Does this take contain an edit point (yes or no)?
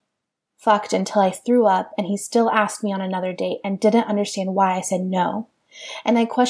no